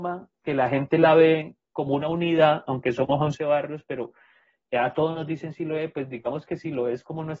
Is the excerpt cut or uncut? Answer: uncut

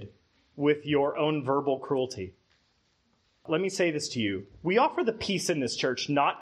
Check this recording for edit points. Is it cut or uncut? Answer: uncut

